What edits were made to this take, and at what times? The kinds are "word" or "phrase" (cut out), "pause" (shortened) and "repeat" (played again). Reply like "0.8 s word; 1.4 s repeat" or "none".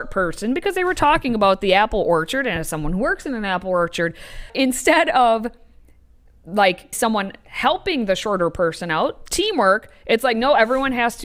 4.5 s word; 6.9 s word